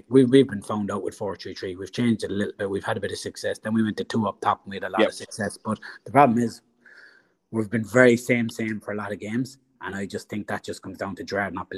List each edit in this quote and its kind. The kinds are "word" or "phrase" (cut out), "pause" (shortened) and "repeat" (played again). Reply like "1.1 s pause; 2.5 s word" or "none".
none